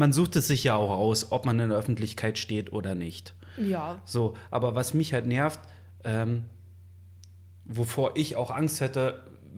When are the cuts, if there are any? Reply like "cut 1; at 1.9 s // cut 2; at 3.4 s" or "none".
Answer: none